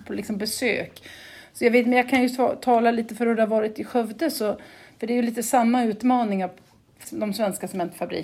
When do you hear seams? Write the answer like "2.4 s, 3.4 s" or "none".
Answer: 7.0 s